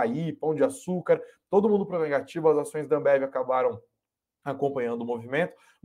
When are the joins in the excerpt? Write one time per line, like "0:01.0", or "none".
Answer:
none